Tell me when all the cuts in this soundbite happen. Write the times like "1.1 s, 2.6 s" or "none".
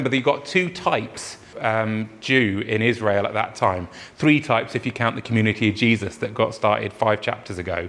1.5 s